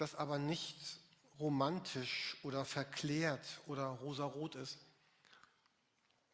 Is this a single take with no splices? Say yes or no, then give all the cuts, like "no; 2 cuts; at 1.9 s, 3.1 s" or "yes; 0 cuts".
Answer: yes; 0 cuts